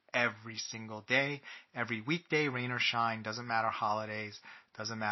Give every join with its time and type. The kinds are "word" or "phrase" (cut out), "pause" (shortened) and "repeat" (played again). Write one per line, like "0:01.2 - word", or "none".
none